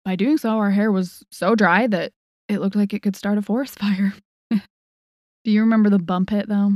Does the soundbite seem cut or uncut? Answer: uncut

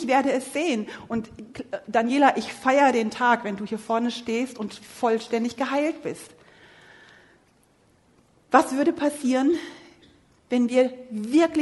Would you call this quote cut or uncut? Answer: uncut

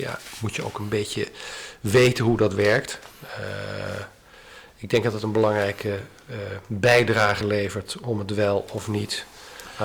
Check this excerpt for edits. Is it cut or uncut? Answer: uncut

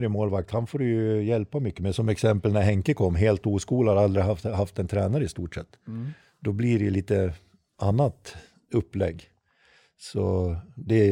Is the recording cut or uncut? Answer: uncut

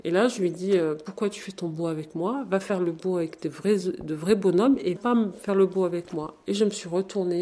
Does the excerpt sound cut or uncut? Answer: cut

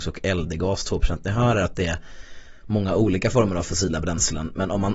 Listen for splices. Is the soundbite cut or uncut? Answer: uncut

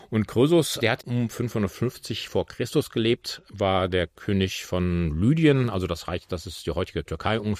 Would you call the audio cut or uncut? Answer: uncut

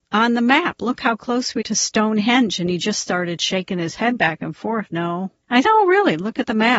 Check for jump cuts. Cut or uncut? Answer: cut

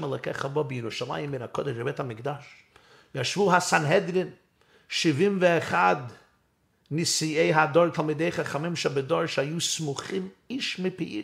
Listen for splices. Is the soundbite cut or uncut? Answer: uncut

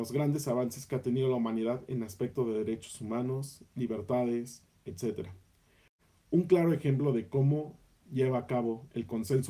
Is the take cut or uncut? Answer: uncut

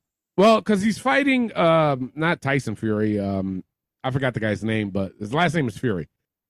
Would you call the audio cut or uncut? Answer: uncut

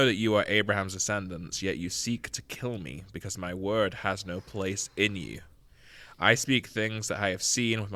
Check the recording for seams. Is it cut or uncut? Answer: uncut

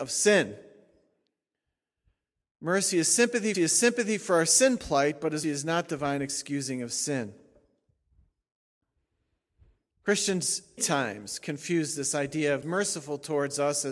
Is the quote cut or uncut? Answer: cut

